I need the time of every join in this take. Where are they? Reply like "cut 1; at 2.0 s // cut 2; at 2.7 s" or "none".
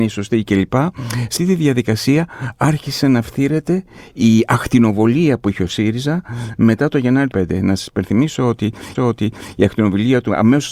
cut 1; at 1.4 s // cut 2; at 7.3 s // cut 3; at 8.9 s